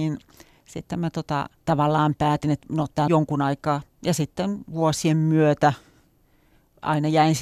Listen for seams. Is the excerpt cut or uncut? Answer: cut